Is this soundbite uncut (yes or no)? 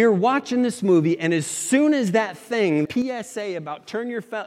no